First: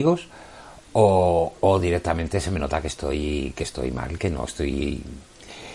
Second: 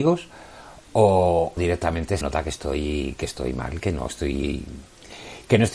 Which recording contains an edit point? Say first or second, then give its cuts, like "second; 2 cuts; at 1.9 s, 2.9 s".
second; 2 cuts; at 1.6 s, 2.2 s